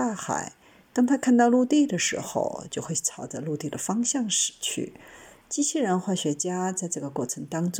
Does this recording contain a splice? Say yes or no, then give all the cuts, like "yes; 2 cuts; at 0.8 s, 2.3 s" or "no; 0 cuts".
no; 0 cuts